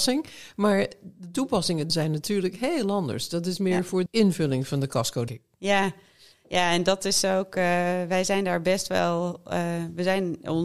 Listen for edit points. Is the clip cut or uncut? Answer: cut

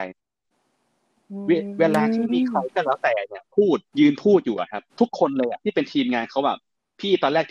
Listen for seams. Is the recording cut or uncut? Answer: cut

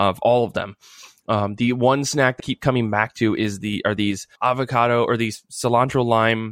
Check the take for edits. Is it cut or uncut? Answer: cut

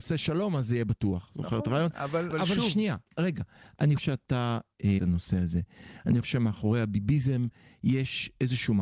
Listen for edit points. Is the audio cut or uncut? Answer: cut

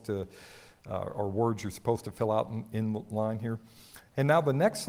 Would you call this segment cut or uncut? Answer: uncut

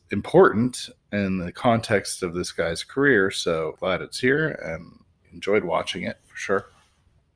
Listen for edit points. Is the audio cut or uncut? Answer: cut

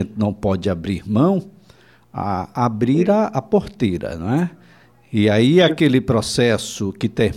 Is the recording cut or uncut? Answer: uncut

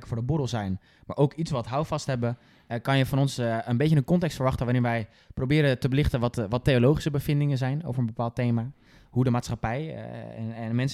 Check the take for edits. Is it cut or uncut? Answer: uncut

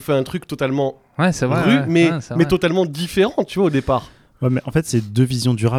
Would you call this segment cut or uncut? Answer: uncut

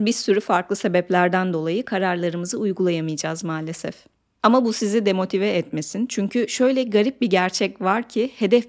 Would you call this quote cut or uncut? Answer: uncut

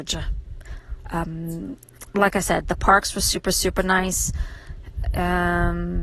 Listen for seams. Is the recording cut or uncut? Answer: uncut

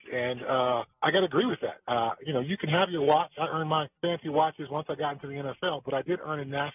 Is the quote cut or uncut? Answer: cut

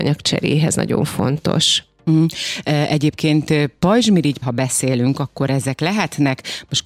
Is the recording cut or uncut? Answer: cut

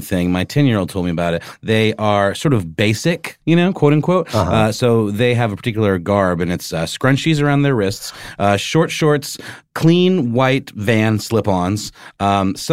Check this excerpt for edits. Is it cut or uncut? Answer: uncut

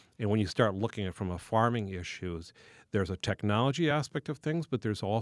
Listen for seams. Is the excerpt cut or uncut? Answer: uncut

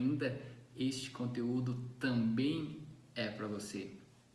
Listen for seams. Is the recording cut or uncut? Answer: uncut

